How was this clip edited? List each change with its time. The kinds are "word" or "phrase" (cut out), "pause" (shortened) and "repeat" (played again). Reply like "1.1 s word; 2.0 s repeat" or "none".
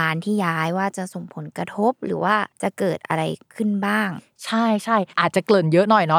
2.5 s pause